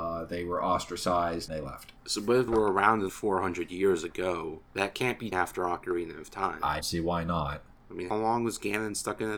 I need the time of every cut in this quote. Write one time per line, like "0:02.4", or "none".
0:01.5
0:02.0
0:02.5
0:03.1
0:04.7
0:05.3
0:06.8
0:08.1